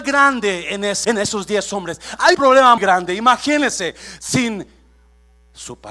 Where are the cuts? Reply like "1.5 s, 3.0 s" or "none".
1.0 s, 2.3 s, 2.8 s